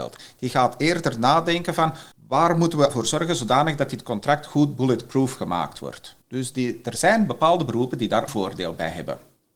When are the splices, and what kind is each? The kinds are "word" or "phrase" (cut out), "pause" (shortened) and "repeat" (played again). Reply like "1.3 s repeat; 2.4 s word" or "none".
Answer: 2.1 s pause; 2.9 s word; 6.2 s pause; 8.3 s word